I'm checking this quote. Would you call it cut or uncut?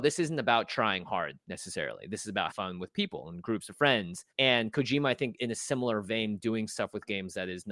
cut